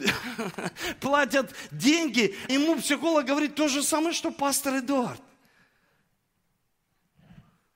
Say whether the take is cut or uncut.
cut